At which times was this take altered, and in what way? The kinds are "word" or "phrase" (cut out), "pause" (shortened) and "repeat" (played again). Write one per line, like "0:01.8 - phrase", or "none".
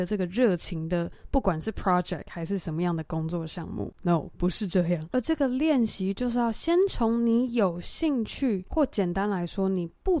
none